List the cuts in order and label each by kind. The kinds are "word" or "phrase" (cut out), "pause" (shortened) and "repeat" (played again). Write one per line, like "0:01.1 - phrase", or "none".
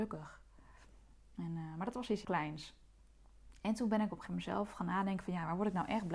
0:02.2 - word
0:04.3 - word